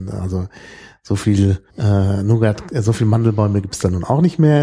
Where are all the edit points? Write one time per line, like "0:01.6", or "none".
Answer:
0:01.7